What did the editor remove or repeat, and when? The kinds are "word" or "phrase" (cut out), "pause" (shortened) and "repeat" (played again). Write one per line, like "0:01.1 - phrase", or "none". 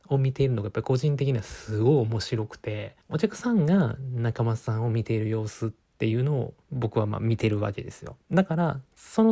0:03.0 - pause
0:06.6 - pause
0:08.2 - pause